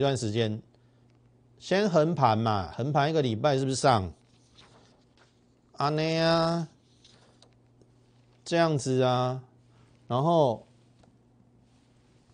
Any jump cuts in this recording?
no; 0 cuts

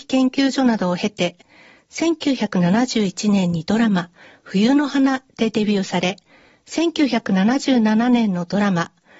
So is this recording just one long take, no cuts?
yes; 0 cuts

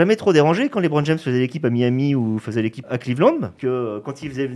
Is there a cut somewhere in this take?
yes; 2 cuts; at 2.8 s, 3.6 s

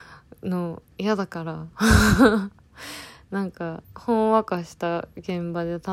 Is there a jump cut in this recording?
yes; 1 cut; at 3.8 s

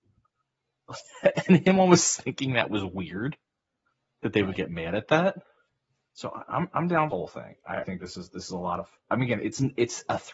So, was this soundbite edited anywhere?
yes; 3 cuts; at 5.7 s, 7.1 s, 7.8 s

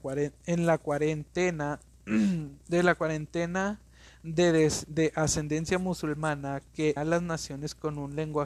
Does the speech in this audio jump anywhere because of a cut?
yes; 1 cut; at 7.0 s

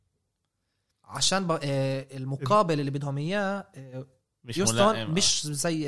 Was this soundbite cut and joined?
no; 0 cuts

